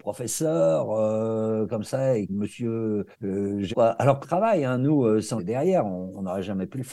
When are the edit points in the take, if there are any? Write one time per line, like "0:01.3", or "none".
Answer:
0:02.3
0:03.1
0:03.7
0:04.2
0:05.4